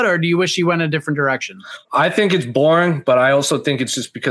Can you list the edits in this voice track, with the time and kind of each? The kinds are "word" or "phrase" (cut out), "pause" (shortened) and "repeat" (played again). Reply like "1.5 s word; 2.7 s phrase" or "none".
1.8 s pause